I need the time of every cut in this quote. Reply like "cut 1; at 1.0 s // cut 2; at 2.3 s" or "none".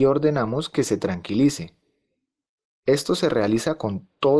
none